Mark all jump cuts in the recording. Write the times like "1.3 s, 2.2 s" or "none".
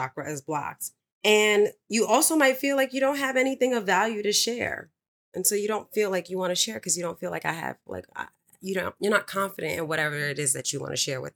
none

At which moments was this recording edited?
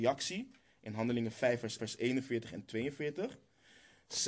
1.8 s

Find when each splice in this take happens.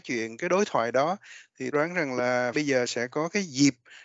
1.7 s, 2.5 s

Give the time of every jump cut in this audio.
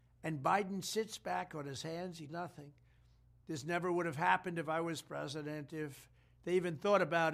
2.3 s

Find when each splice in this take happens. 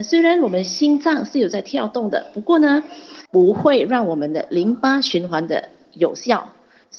3.3 s

